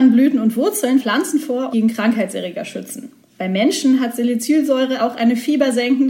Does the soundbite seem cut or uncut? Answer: cut